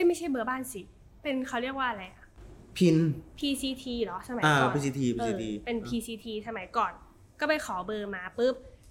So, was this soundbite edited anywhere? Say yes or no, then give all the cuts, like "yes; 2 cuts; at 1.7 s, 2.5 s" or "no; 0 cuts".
no; 0 cuts